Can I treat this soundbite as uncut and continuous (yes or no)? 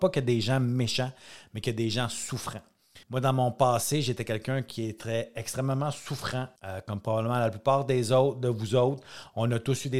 no